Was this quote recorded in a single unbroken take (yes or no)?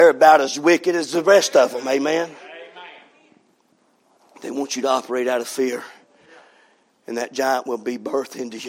yes